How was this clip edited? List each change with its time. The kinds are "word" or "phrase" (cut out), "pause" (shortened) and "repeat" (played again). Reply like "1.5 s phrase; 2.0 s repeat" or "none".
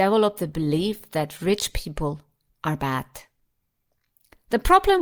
none